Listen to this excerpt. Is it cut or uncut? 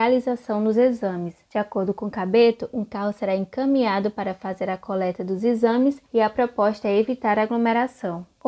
uncut